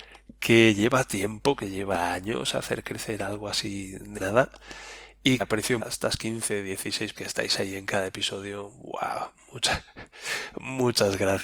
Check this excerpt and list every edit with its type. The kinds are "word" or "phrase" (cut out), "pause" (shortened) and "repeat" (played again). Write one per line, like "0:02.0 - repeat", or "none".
0:04.2 - word
0:05.4 - word
0:05.8 - word
0:07.1 - word